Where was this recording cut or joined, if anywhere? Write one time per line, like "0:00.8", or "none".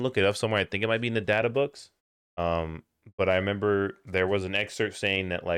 0:02.0